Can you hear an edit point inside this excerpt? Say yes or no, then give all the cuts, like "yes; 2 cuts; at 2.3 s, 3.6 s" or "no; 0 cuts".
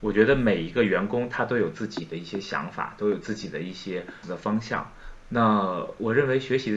yes; 1 cut; at 4.2 s